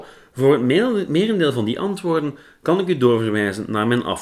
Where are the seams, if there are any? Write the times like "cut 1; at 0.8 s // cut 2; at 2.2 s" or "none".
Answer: none

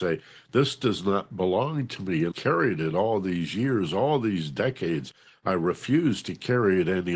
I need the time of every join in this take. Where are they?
cut 1; at 2.3 s

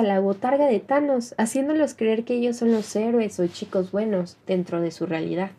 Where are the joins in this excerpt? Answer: cut 1; at 4.4 s

